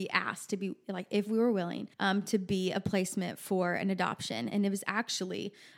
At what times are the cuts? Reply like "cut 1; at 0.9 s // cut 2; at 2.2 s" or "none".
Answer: cut 1; at 1.9 s